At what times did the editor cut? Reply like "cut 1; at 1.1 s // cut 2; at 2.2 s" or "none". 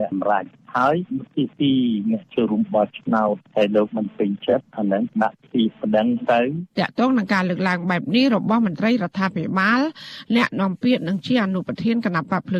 cut 1; at 6.7 s